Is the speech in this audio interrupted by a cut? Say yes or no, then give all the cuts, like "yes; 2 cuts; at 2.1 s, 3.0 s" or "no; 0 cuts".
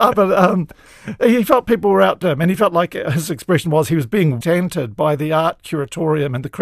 yes; 2 cuts; at 2.2 s, 4.4 s